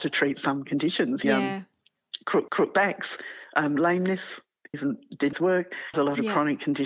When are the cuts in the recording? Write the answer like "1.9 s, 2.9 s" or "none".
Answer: 1.2 s, 2.5 s, 4.7 s, 5.3 s, 5.9 s